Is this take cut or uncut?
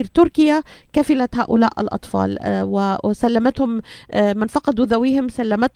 uncut